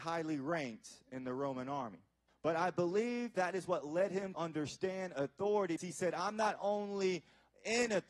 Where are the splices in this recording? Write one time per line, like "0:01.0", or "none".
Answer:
0:02.3
0:04.3
0:05.8